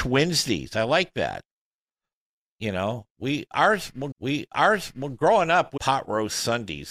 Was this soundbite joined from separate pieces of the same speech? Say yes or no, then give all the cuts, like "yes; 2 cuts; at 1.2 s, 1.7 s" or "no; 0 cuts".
yes; 2 cuts; at 4.1 s, 5.8 s